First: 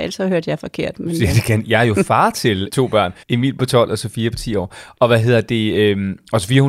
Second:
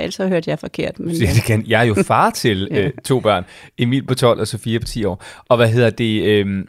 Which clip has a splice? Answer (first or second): first